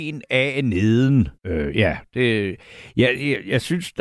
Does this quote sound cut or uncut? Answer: cut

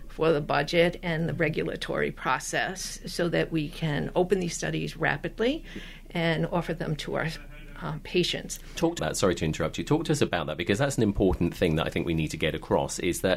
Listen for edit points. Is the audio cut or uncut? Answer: cut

